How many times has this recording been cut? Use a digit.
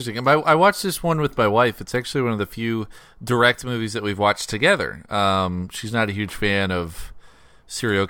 1